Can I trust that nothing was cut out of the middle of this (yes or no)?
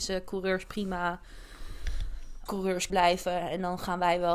no